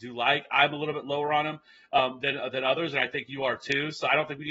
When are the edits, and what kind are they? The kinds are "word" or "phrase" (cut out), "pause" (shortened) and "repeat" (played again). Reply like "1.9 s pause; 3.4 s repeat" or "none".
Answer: none

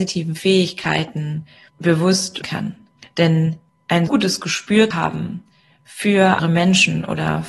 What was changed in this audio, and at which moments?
2.4 s word; 4.1 s word; 4.9 s word; 6.4 s word

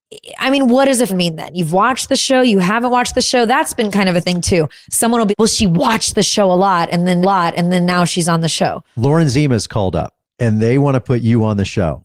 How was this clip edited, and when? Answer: 1.1 s word; 5.3 s word; 7.2 s repeat; 10.2 s pause

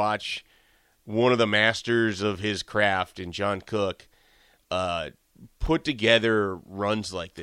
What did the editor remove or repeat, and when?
none

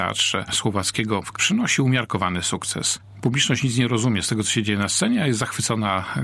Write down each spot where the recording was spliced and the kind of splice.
1.3 s word

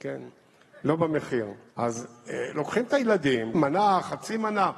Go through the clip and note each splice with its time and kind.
1.7 s pause; 3.5 s word

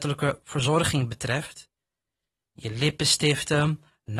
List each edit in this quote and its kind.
none

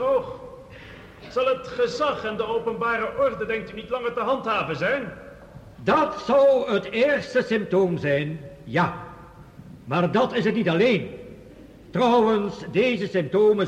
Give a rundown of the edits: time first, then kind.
5.7 s pause

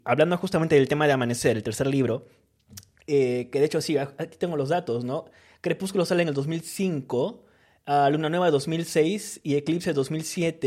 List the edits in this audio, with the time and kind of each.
none

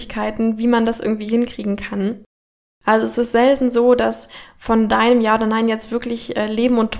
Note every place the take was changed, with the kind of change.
none

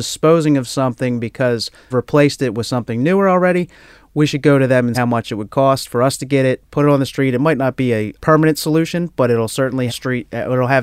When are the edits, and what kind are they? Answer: 1.9 s word; 4.9 s word; 8.2 s word; 9.9 s word

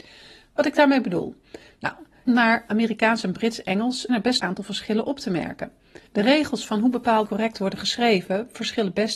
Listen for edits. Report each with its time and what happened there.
2.3 s word; 4.1 s word; 4.4 s phrase; 6.1 s pause; 7.2 s word

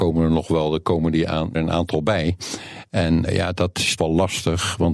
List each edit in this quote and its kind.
1.5 s word; 3.3 s word; 4.0 s word

